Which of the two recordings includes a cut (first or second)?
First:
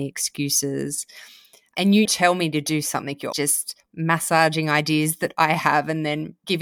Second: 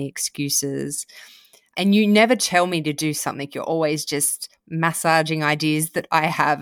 first